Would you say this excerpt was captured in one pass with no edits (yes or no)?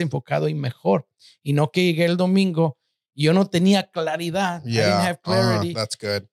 yes